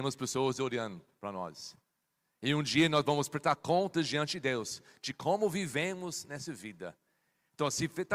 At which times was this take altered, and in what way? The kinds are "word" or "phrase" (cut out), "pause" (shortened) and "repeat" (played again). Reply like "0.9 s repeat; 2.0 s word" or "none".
none